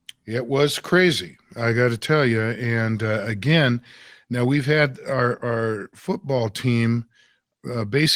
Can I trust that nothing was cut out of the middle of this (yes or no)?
yes